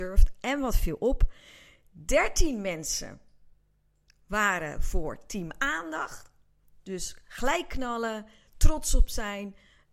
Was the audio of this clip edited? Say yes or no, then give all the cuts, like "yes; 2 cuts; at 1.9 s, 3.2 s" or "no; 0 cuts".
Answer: no; 0 cuts